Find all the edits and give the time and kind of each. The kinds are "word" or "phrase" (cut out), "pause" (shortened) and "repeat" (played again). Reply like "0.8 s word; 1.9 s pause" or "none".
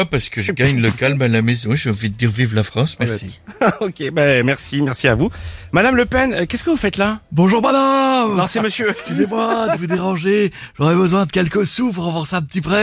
none